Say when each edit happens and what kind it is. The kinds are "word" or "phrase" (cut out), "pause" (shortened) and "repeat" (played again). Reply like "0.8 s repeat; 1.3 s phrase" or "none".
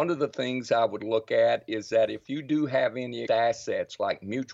3.3 s word